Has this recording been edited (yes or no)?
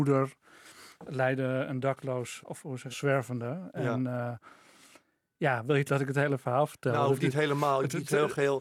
yes